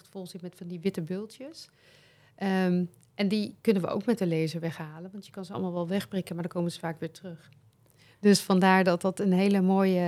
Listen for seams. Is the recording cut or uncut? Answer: uncut